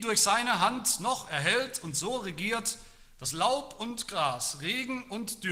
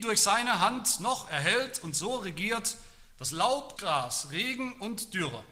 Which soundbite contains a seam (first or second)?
second